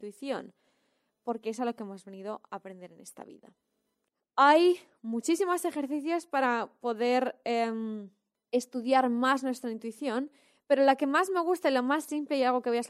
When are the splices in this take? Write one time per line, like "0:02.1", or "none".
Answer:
0:04.1
0:08.3

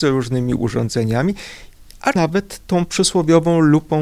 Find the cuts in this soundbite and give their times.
0:02.2

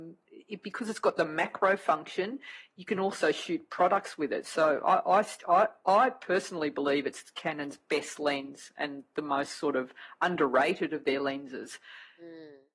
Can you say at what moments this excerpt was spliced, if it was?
none

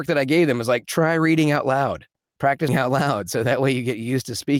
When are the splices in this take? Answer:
0:02.7

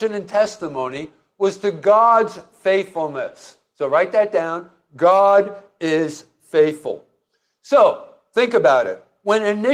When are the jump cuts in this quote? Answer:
none

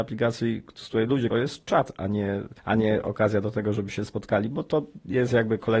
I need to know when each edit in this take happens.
0:01.3
0:02.6

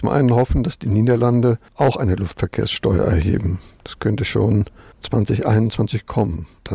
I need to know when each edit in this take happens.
none

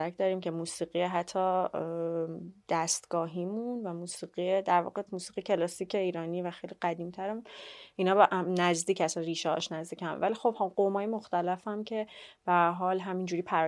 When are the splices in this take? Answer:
0:05.1

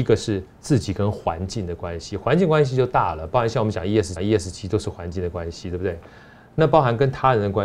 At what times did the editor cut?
0:04.2

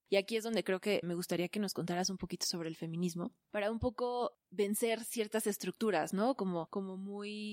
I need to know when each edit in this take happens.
0:01.0
0:03.4

